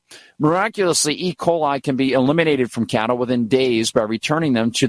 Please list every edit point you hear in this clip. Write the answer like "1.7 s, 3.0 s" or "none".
none